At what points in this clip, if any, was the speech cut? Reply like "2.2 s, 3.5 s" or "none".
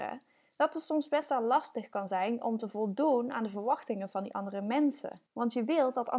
5.3 s